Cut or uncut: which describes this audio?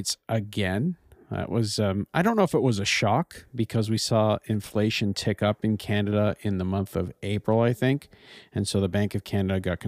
uncut